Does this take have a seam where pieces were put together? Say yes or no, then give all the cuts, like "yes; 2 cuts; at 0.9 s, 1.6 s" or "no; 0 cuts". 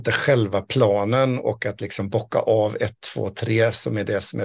no; 0 cuts